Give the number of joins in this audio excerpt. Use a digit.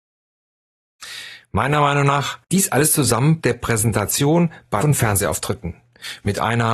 3